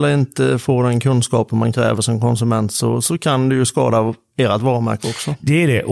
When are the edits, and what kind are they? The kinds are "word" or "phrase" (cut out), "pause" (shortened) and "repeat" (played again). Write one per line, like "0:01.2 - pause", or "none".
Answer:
none